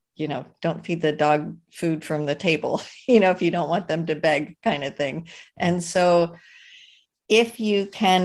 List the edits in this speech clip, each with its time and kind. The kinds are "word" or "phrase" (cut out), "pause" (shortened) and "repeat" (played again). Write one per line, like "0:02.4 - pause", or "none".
none